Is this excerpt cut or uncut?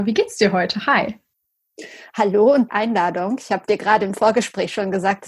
cut